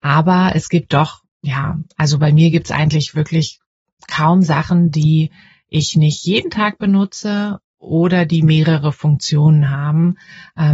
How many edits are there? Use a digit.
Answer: 0